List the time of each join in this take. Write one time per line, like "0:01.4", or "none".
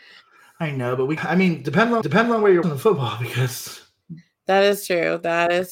0:01.2
0:02.0
0:02.6